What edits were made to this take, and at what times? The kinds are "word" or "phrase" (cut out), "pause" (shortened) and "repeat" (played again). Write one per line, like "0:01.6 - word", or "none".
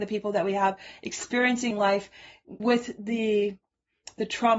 0:01.7 - word
0:02.6 - word